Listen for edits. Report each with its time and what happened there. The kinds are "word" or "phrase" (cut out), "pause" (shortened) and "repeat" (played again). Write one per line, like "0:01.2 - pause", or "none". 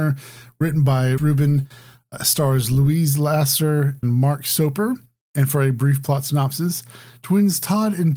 0:01.2 - word
0:04.0 - word